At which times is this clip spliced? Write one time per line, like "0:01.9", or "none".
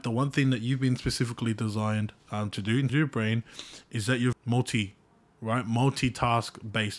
0:02.2
0:02.9
0:04.3